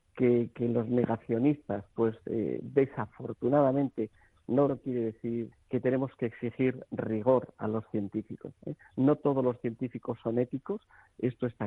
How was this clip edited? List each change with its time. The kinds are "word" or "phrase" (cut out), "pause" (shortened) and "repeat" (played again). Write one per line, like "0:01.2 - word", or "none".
0:04.7 - phrase
0:05.5 - word